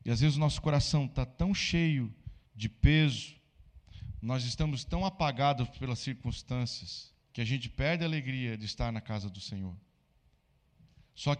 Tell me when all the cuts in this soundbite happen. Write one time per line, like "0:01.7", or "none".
0:02.5
0:07.2